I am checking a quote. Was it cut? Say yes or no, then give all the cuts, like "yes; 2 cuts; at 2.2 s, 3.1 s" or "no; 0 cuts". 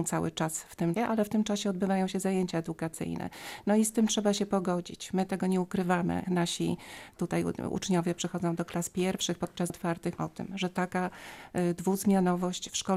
yes; 4 cuts; at 1.0 s, 6.2 s, 9.7 s, 10.2 s